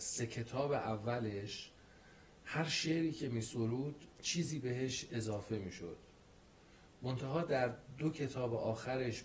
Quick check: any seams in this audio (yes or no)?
no